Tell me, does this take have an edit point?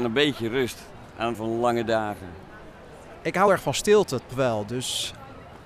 yes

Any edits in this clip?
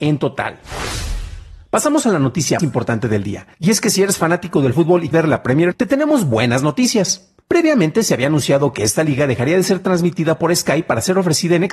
yes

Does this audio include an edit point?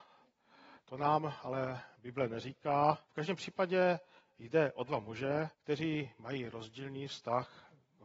yes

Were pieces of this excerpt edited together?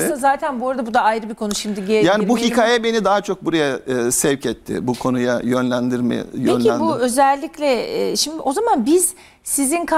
no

